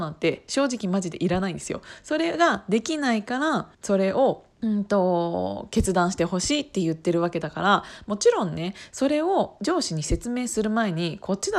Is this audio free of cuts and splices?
no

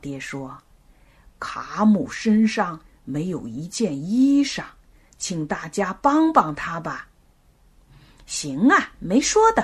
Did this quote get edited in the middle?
no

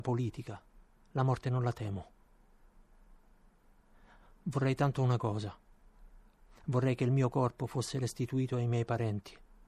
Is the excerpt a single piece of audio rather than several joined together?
yes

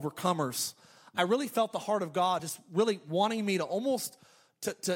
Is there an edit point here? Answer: no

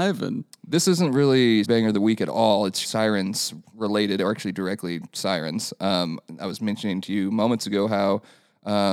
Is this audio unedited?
no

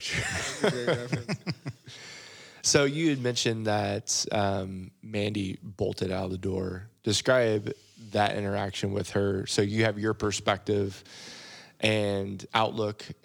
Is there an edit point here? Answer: no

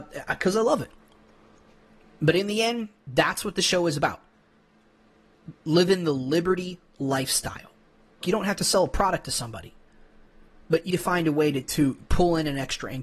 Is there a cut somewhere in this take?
yes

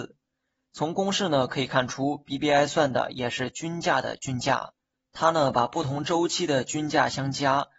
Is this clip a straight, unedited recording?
yes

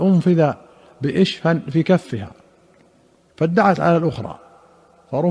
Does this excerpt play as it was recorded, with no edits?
yes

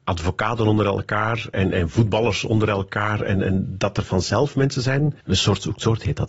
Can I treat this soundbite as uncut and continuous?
no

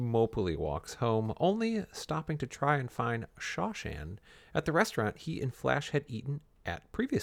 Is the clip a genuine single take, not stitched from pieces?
yes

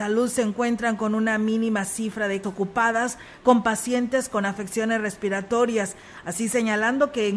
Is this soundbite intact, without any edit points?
no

